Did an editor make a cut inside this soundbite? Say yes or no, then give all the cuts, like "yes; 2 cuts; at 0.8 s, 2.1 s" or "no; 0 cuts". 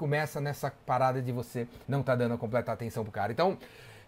yes; 1 cut; at 1.8 s